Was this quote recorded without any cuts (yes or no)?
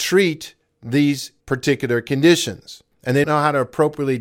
no